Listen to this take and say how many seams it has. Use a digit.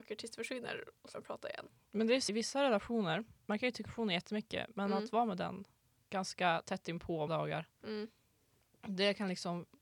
4